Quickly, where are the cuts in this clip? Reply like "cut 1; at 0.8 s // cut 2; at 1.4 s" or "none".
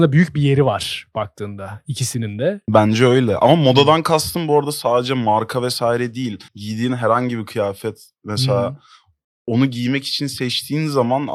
cut 1; at 6.5 s // cut 2; at 9.2 s